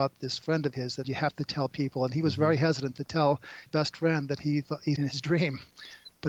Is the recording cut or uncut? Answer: cut